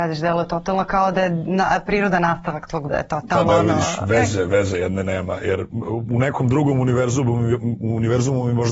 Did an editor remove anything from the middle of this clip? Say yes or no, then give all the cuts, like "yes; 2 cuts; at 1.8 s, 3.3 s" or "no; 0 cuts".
yes; 2 cuts; at 2.9 s, 3.5 s